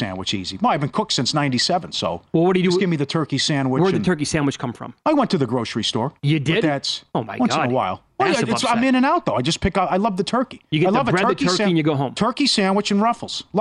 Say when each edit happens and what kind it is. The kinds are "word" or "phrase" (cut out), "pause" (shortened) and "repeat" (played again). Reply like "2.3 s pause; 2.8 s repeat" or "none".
5.0 s pause; 6.2 s pause; 7.1 s pause